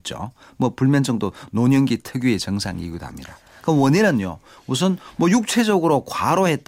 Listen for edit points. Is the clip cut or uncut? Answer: uncut